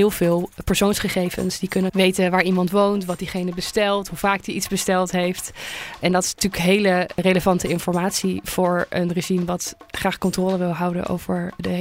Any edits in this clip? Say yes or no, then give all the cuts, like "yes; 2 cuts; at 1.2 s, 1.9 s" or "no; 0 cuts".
yes; 1 cut; at 1.9 s